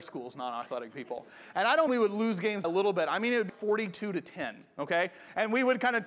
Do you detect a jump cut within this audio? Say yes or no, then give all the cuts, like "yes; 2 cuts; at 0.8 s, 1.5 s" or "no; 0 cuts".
yes; 3 cuts; at 1.9 s, 2.6 s, 3.5 s